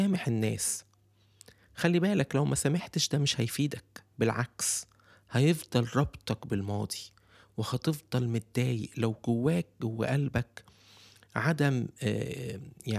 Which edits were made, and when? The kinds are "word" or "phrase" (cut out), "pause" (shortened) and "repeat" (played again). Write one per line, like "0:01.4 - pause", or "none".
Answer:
none